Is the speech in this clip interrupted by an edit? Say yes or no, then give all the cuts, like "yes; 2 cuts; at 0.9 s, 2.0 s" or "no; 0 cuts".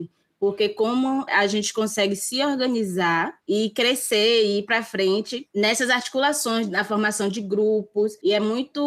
no; 0 cuts